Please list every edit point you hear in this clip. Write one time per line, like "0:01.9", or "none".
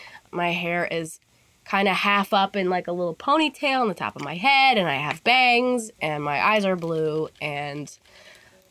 none